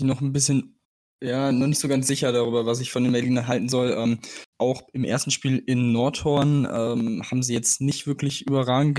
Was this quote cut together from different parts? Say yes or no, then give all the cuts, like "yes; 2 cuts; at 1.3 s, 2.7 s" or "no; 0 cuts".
yes; 1 cut; at 4.5 s